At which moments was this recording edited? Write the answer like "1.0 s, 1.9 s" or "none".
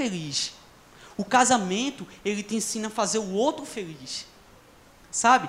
none